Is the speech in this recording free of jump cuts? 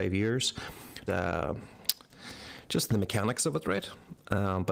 no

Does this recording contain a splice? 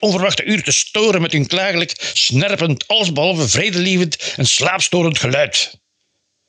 no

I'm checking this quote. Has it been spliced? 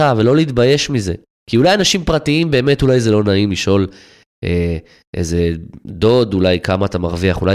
no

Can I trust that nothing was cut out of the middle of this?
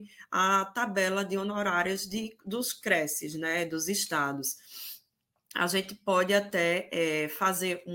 yes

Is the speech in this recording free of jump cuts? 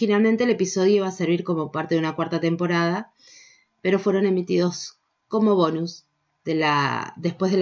yes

